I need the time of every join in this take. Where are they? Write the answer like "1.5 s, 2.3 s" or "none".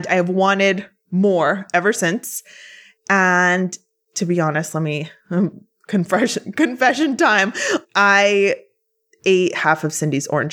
none

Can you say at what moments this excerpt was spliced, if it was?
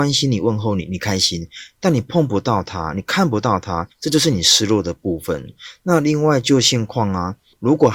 3.9 s

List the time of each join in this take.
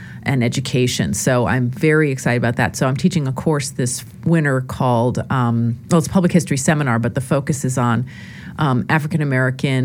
none

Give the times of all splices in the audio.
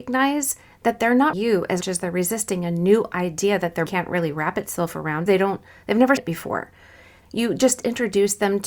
1.3 s, 1.8 s, 3.9 s, 5.3 s, 6.2 s, 7.2 s

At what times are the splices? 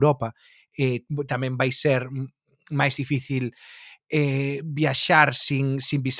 none

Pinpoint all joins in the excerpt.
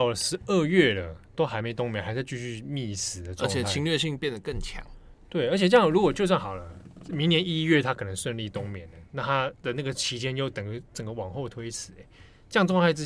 9.6 s

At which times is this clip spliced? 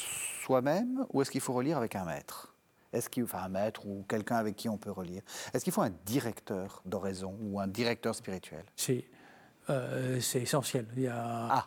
6.8 s

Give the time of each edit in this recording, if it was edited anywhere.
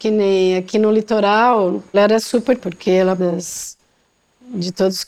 1.9 s, 2.6 s, 3.2 s

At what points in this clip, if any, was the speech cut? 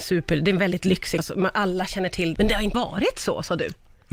1.2 s, 2.4 s, 2.7 s

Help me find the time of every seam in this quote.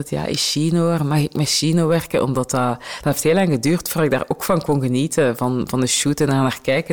none

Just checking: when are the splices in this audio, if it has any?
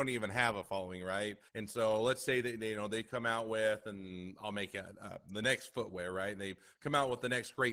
1.5 s

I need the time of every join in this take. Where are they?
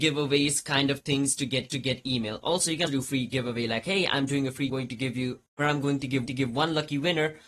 1.7 s, 2.9 s, 4.7 s, 5.5 s, 6.3 s

